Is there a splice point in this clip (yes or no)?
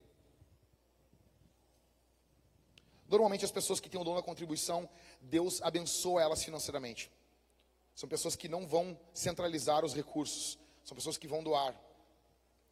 no